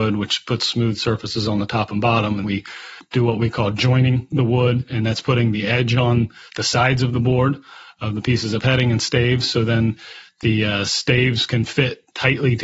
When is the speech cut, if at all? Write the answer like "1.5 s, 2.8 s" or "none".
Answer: 2.4 s